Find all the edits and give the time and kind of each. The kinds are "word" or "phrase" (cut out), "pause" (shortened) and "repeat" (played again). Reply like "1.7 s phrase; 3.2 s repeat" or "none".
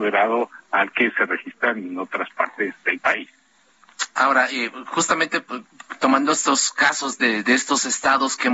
none